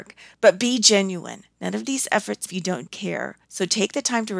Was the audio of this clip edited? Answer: yes; 4 cuts; at 1.5 s, 2.5 s, 2.9 s, 3.4 s

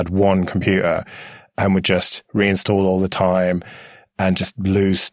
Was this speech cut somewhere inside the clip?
no; 0 cuts

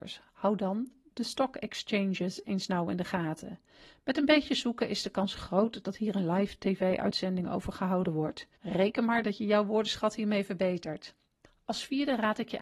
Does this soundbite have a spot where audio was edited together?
yes; 1 cut; at 8.5 s

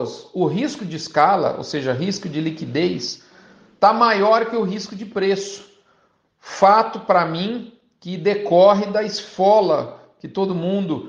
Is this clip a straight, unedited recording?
yes; 0 cuts

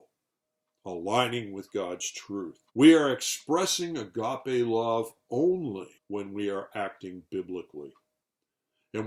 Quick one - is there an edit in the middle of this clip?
yes; 2 cuts; at 2.7 s, 6.0 s

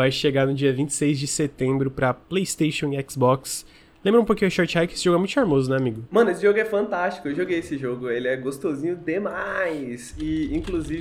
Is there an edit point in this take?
no; 0 cuts

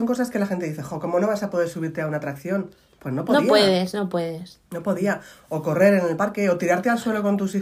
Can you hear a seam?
no; 0 cuts

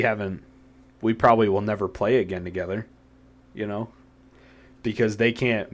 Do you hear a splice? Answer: no; 0 cuts

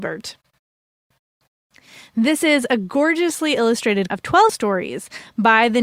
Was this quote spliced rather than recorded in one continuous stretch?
yes; 2 cuts; at 4.1 s, 4.5 s

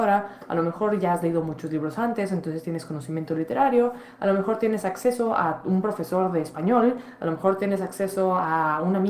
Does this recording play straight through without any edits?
yes; 0 cuts

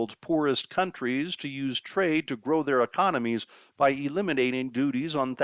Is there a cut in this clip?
no; 0 cuts

